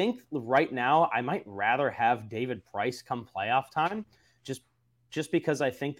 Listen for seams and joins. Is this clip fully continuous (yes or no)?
yes